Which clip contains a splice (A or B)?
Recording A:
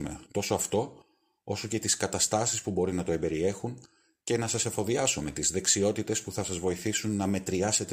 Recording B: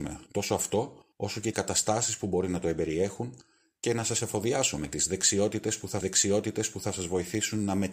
B